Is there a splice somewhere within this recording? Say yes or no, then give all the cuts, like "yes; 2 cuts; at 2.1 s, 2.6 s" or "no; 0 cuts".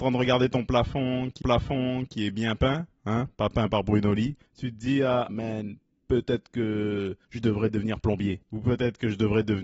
yes; 5 cuts; at 1.4 s, 4.5 s, 5.3 s, 7.2 s, 8.4 s